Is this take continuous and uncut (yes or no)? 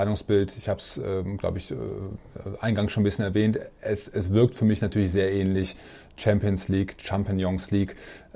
yes